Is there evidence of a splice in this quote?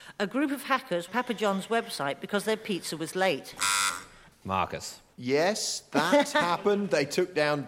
yes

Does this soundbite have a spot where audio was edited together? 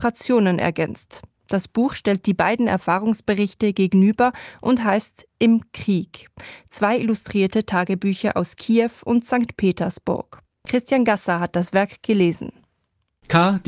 no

